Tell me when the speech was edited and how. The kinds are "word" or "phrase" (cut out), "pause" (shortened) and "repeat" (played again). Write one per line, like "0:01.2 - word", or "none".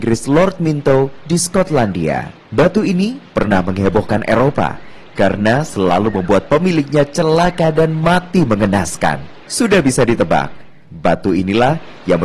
0:02.4 - pause
0:09.4 - pause